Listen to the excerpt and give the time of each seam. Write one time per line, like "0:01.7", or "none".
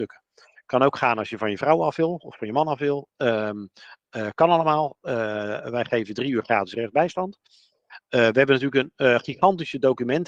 none